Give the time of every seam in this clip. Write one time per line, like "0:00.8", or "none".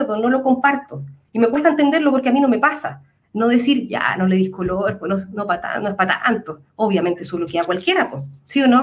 none